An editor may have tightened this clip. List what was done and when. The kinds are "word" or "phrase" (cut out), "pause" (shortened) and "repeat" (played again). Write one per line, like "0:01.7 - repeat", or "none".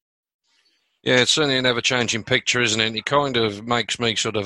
none